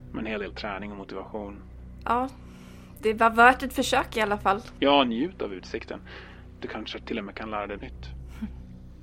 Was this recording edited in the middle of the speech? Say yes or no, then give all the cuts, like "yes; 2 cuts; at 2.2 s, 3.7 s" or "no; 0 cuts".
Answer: yes; 1 cut; at 7.8 s